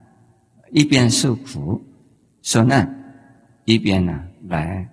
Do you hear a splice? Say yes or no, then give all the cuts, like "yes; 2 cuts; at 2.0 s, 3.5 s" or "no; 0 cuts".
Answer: no; 0 cuts